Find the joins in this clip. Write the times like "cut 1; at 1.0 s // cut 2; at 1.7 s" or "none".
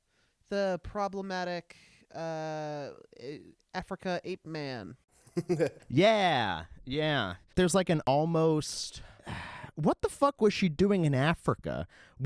none